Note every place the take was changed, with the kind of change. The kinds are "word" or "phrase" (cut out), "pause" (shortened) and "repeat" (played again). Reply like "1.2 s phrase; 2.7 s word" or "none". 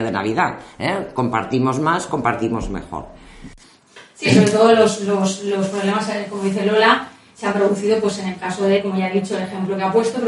none